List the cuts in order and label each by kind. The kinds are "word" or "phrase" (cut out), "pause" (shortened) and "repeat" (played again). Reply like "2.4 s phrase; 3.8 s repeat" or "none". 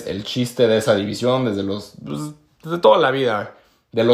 none